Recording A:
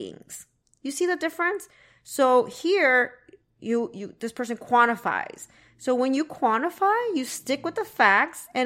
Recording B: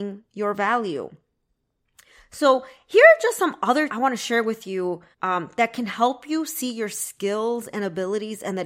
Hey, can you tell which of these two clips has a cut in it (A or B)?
B